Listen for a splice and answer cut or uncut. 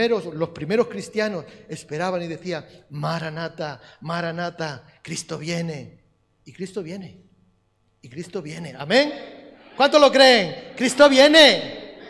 uncut